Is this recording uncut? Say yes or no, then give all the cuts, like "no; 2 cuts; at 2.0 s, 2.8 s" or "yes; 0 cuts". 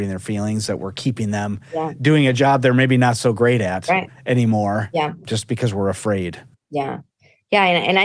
yes; 0 cuts